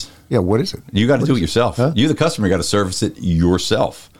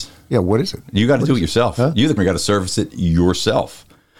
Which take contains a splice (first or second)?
second